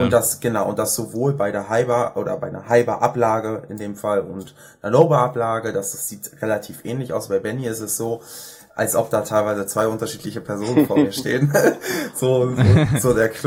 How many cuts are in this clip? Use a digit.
0